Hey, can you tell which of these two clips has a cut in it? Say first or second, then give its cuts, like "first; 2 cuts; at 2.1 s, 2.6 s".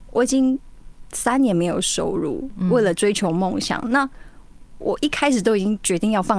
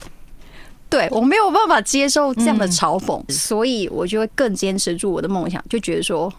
second; 1 cut; at 3.3 s